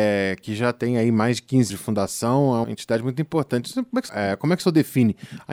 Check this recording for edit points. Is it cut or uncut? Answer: cut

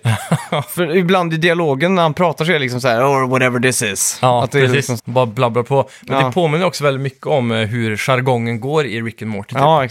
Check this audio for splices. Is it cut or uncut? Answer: cut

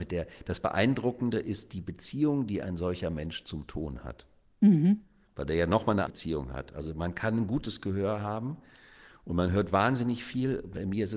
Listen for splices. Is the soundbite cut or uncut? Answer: cut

